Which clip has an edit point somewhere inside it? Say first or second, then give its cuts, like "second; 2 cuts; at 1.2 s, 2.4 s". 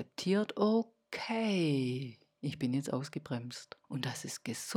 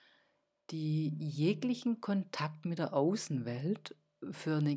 first; 1 cut; at 3.8 s